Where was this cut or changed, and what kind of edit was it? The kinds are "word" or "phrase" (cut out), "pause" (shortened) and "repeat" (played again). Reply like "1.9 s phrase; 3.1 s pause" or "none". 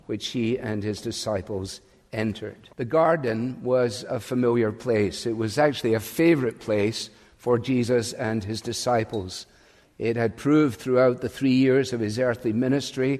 2.7 s pause